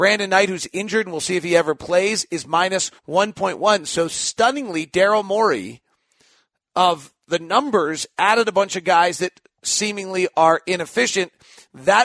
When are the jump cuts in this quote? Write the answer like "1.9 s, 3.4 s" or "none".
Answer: 3.0 s